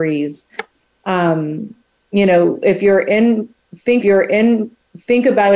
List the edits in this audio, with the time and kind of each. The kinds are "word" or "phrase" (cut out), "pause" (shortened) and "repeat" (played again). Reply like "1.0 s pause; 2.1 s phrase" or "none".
4.0 s repeat